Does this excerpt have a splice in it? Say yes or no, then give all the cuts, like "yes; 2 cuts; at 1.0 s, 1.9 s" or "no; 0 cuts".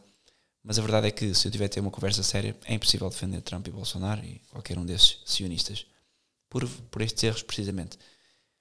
no; 0 cuts